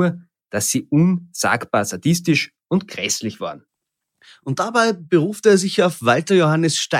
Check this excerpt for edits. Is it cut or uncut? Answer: uncut